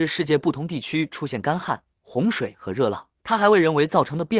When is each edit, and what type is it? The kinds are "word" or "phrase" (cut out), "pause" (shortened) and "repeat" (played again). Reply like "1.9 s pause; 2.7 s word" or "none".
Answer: 3.1 s pause